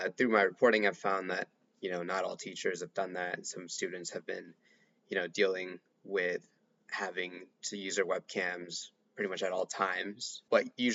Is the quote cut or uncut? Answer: uncut